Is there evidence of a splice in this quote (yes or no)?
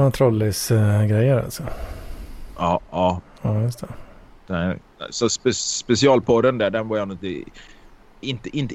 no